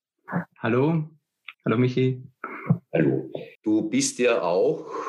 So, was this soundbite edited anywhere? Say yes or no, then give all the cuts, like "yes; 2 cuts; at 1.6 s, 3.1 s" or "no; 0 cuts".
yes; 2 cuts; at 1.5 s, 3.5 s